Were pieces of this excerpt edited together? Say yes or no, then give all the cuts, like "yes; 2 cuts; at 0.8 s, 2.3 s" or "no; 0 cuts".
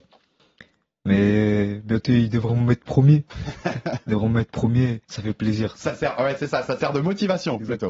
yes; 1 cut; at 5.0 s